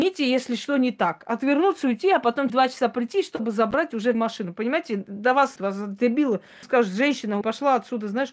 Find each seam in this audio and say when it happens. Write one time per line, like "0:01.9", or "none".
0:02.5
0:04.1
0:05.6
0:06.6
0:07.4